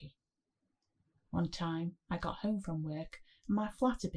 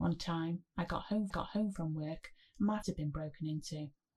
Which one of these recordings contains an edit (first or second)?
second